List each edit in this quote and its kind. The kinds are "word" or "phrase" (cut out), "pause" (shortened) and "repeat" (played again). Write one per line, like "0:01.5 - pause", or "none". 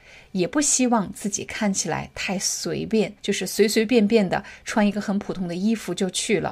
0:03.2 - pause